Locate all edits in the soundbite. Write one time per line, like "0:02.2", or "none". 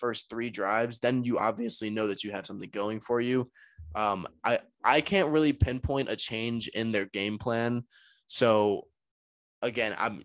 none